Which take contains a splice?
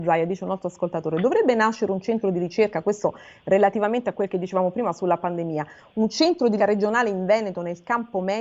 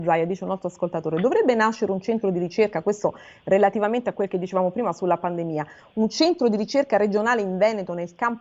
first; 1 cut; at 6.6 s

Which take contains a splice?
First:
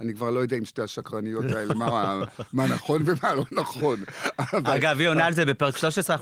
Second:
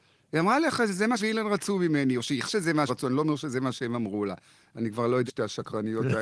second; 4 cuts; at 1.2 s, 2.5 s, 2.9 s, 5.3 s

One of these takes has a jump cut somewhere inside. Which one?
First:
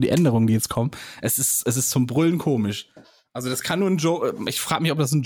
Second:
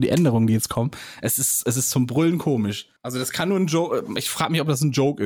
second; 1 cut; at 3.0 s

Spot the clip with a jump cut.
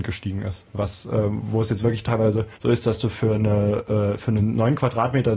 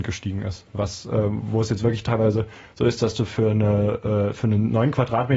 first; 1 cut; at 2.6 s

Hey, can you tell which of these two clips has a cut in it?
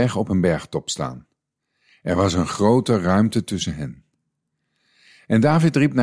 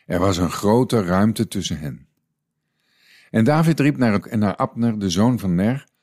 second; 1 cut; at 4.2 s

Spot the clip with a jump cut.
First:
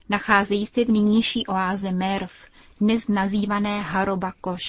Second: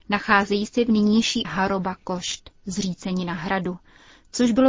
second; 1 cut; at 1.4 s

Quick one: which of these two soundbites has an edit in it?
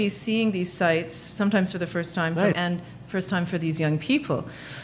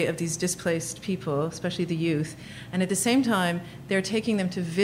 first; 1 cut; at 2.5 s

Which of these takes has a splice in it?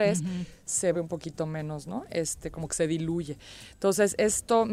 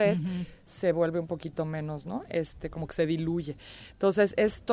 first; 1 cut; at 0.9 s

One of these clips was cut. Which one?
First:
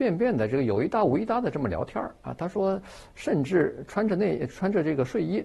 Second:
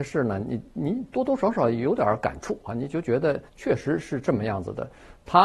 second; 1 cut; at 3.5 s

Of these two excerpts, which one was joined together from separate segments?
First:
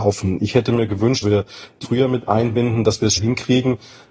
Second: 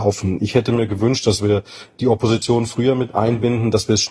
first; 3 cuts; at 1.2 s, 1.8 s, 3.2 s

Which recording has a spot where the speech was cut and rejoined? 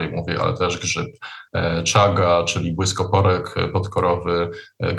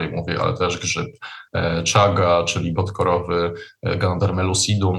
second; 1 cut; at 2.8 s

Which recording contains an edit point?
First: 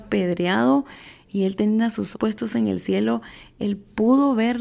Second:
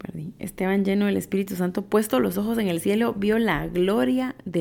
first; 1 cut; at 2.1 s

